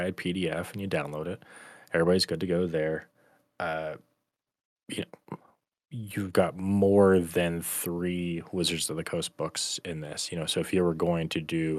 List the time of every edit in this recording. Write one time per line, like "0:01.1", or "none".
none